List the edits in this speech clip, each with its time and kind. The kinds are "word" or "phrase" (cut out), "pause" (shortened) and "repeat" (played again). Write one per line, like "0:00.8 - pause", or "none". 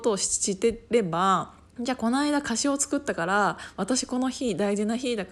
0:01.7 - pause